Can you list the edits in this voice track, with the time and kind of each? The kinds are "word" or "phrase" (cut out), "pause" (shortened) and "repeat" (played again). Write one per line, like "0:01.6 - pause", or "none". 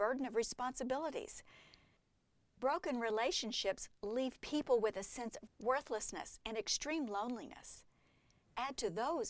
0:05.5 - word